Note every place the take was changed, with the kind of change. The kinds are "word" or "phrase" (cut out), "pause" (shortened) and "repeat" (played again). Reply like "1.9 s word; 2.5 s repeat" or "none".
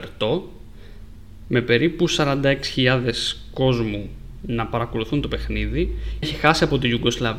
6.2 s word